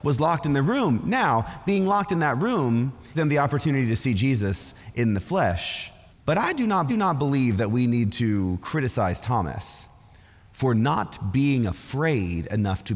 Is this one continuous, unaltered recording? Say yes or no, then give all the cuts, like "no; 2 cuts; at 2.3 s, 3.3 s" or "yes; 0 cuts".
no; 3 cuts; at 3.1 s, 6.1 s, 6.9 s